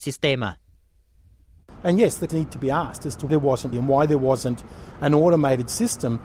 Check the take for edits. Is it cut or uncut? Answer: cut